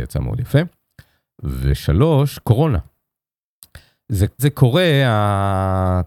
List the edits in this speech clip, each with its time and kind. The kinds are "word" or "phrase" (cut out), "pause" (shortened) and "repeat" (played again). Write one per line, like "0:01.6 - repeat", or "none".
0:04.4 - word